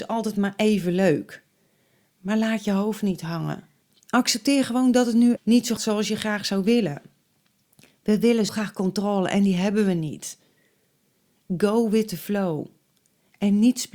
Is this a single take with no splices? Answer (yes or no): no